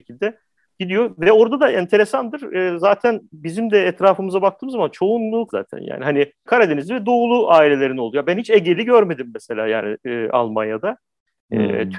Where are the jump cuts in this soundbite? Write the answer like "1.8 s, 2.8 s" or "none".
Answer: 3.3 s, 5.5 s, 6.5 s